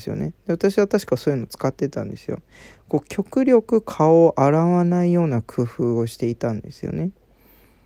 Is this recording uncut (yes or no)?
yes